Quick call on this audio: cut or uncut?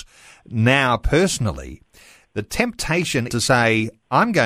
cut